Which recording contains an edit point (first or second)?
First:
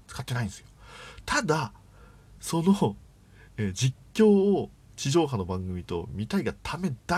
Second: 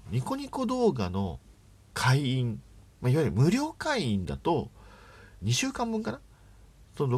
second